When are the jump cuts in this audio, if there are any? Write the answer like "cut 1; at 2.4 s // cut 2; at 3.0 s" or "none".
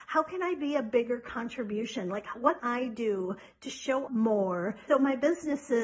cut 1; at 2.6 s // cut 2; at 4.1 s // cut 3; at 4.9 s